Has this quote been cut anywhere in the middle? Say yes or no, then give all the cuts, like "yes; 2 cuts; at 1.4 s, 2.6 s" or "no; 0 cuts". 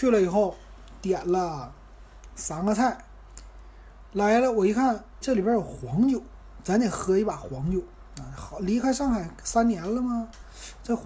yes; 1 cut; at 5.2 s